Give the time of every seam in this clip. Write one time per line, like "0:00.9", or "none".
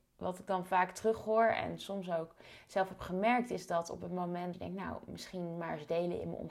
0:04.5